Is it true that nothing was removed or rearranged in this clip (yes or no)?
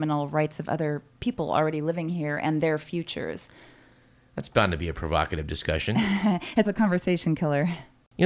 no